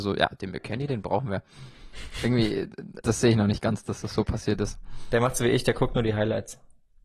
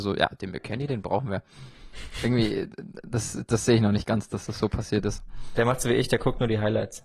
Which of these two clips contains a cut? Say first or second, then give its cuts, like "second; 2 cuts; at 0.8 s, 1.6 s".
first; 1 cut; at 3.0 s